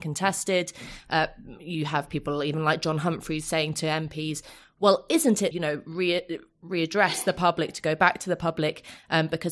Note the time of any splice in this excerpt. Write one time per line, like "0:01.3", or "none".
0:05.5